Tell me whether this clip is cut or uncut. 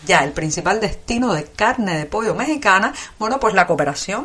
uncut